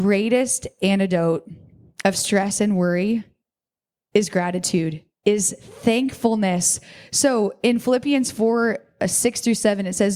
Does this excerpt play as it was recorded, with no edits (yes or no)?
yes